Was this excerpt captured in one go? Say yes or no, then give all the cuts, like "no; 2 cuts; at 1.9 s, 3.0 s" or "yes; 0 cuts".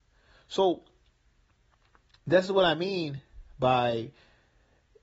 yes; 0 cuts